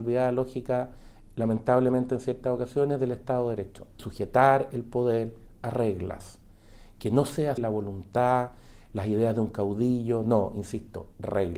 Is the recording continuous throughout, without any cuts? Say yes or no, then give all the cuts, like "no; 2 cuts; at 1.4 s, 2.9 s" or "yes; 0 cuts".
no; 2 cuts; at 4.0 s, 7.6 s